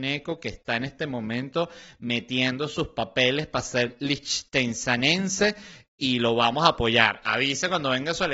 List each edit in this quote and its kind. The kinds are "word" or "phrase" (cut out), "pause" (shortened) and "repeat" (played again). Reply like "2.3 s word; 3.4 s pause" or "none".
none